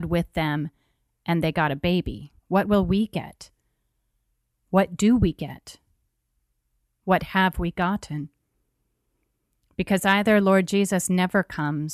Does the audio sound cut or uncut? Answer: cut